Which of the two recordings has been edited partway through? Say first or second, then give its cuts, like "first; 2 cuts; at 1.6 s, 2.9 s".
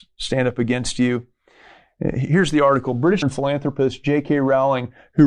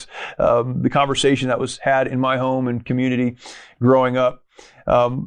first; 1 cut; at 3.2 s